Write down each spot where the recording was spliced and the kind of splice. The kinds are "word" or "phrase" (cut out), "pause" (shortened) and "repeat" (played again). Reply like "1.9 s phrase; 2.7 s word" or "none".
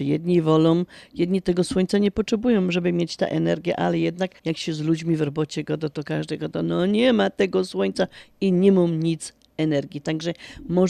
4.4 s pause